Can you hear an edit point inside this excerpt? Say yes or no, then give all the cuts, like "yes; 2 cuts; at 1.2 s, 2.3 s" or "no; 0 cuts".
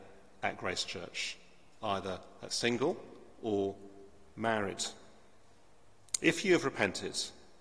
no; 0 cuts